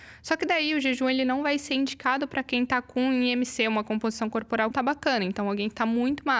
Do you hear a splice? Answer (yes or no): yes